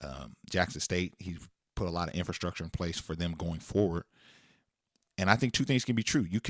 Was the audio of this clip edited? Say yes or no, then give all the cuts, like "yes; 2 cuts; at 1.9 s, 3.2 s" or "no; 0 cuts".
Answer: no; 0 cuts